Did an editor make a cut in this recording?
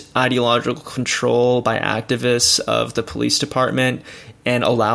no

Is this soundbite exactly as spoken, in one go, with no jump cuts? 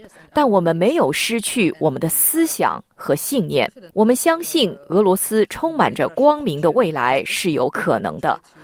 no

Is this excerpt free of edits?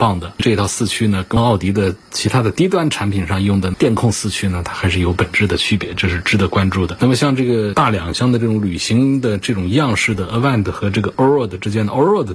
yes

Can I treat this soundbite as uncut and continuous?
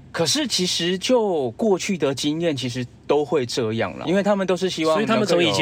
no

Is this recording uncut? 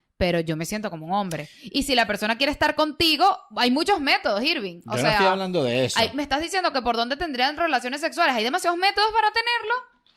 yes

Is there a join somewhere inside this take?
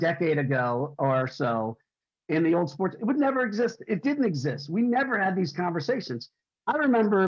no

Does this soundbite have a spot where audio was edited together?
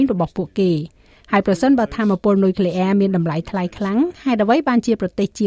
no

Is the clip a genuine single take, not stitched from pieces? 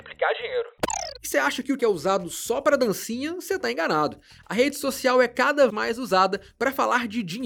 no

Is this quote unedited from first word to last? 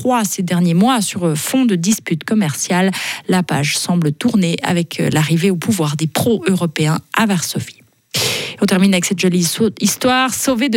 yes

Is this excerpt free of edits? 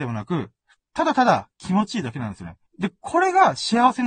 no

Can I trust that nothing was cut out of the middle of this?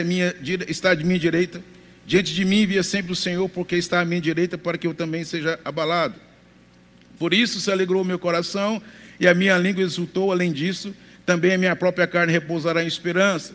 yes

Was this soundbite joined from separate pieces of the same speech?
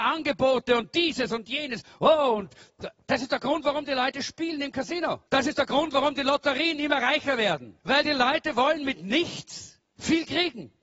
yes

